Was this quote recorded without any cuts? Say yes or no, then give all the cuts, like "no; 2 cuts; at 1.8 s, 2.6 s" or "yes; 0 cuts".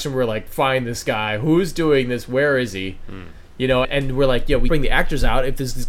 no; 2 cuts; at 3.8 s, 4.7 s